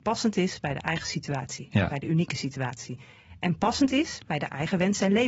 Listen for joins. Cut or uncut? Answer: uncut